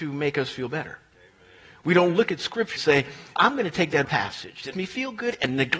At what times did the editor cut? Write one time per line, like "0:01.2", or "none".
0:02.8
0:03.4
0:04.0
0:04.7